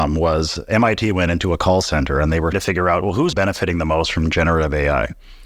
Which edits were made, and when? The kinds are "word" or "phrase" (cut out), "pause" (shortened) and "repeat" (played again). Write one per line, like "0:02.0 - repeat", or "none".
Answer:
0:02.5 - word
0:03.3 - word